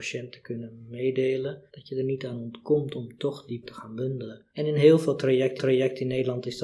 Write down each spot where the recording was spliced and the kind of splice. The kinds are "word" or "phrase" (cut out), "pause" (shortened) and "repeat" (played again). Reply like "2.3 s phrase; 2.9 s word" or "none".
1.7 s pause; 3.6 s word; 4.5 s pause; 5.6 s repeat